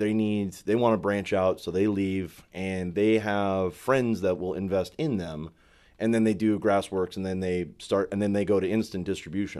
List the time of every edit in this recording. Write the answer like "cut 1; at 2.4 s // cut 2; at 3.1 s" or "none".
none